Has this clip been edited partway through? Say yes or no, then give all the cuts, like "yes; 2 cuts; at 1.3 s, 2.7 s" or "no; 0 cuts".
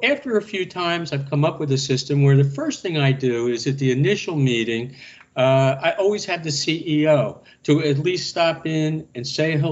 no; 0 cuts